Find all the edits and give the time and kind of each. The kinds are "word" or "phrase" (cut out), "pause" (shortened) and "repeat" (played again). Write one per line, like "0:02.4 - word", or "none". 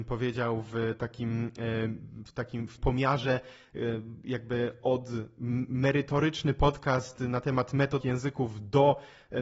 0:02.8 - word
0:08.0 - word